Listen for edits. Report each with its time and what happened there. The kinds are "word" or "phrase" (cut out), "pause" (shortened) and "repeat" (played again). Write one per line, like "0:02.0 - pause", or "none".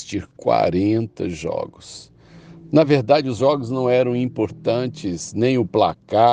none